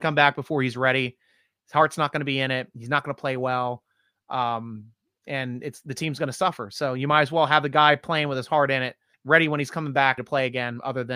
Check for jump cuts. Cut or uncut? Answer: cut